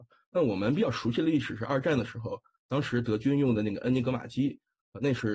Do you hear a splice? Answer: no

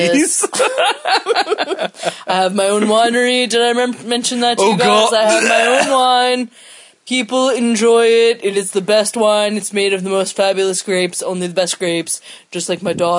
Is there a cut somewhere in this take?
no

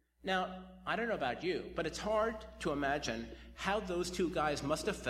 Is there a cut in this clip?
no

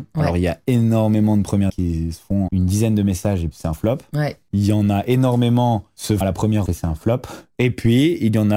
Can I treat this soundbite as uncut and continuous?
no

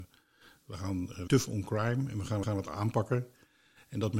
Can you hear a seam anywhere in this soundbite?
yes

